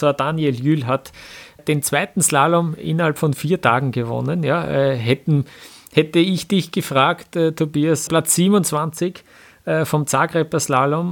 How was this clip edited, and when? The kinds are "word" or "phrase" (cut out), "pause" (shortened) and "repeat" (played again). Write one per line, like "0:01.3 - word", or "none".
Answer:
0:01.6 - word
0:08.1 - phrase